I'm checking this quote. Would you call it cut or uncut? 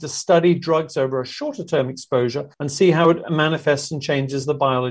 cut